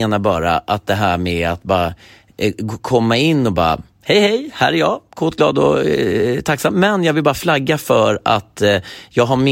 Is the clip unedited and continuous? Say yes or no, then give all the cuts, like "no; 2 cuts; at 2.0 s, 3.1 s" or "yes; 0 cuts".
yes; 0 cuts